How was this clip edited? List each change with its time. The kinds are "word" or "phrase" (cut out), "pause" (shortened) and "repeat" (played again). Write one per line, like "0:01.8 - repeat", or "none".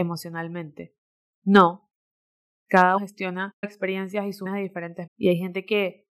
0:03.0 - word
0:03.6 - word
0:04.4 - word
0:05.1 - word